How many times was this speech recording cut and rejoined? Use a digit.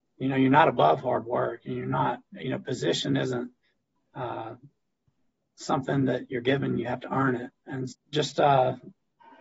1